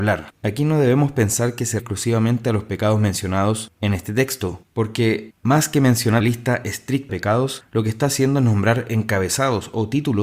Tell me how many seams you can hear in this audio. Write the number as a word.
three